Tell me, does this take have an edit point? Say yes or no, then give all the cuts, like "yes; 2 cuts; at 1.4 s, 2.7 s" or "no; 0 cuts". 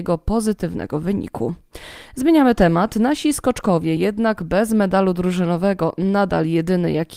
no; 0 cuts